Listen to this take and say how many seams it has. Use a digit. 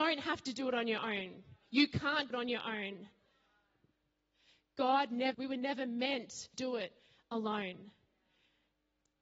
3